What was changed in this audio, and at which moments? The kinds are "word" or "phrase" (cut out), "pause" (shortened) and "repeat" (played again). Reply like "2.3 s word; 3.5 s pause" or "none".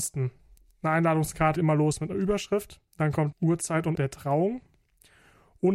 1.6 s word; 2.9 s pause; 3.3 s word; 4.0 s word

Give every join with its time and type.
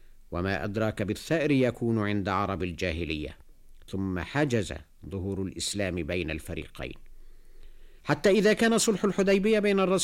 8.0 s pause

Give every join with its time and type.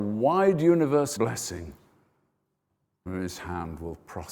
1.2 s word; 3.1 s word

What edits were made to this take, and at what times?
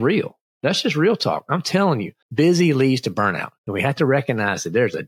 2.2 s pause; 3.6 s pause

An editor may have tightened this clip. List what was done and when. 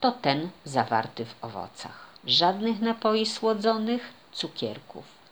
2.2 s pause; 4.3 s word

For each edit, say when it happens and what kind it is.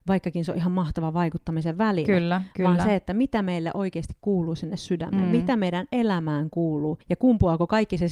7.0 s pause

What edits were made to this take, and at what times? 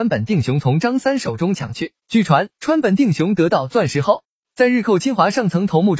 2.0 s pause; 2.5 s pause

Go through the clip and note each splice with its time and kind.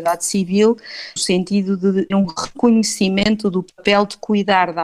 1.2 s word; 2.1 s word

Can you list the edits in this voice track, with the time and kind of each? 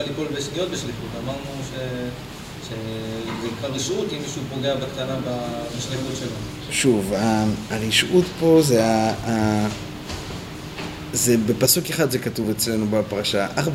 none

